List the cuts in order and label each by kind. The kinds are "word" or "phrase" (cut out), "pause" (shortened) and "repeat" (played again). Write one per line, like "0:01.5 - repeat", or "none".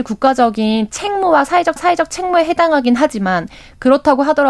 0:01.8 - repeat